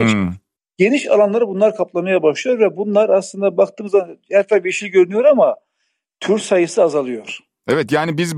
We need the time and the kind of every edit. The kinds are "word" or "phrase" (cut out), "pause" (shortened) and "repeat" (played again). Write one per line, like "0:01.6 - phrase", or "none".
none